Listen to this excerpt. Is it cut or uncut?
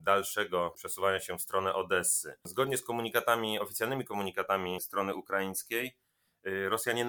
uncut